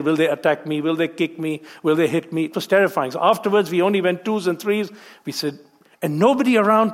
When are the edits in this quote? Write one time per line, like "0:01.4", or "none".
none